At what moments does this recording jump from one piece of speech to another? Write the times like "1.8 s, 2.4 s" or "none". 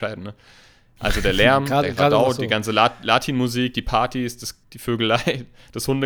4.6 s